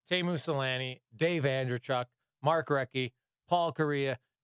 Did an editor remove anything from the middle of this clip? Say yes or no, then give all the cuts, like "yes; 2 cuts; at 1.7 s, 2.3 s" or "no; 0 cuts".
no; 0 cuts